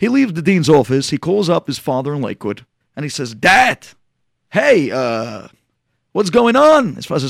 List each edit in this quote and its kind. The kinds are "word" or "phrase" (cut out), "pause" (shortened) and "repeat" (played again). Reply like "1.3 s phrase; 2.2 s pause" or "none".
2.8 s pause